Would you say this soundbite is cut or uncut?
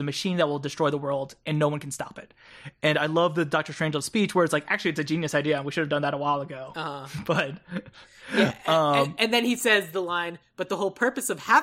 uncut